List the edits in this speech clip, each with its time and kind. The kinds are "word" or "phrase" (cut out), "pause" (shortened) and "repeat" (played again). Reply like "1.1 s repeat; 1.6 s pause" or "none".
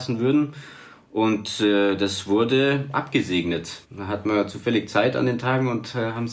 3.8 s pause